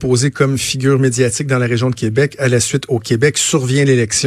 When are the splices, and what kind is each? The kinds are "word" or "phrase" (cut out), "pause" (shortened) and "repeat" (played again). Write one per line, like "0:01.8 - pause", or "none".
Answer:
none